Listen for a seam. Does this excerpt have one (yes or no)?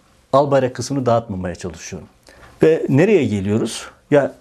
yes